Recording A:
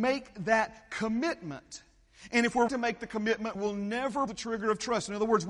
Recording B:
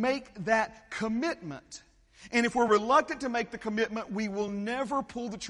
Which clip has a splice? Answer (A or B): A